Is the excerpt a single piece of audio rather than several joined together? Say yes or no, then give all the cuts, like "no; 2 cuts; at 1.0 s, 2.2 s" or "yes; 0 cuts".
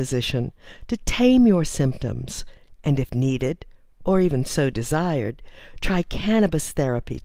yes; 0 cuts